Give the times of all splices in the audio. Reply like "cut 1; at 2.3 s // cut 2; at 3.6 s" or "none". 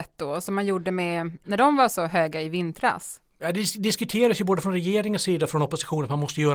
cut 1; at 1.4 s // cut 2; at 3.3 s